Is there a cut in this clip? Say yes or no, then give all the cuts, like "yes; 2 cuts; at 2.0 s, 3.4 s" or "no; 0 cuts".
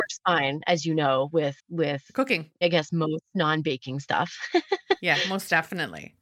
yes; 1 cut; at 1.6 s